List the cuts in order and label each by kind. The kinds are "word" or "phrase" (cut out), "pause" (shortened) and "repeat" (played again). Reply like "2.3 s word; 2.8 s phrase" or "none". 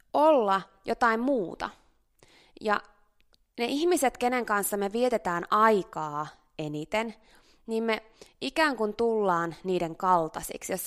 none